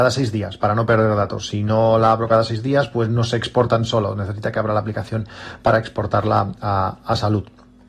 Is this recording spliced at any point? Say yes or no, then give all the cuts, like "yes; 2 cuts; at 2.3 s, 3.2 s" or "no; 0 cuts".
no; 0 cuts